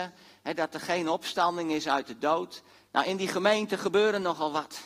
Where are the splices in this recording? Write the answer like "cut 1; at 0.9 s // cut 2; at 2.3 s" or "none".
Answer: cut 1; at 2.8 s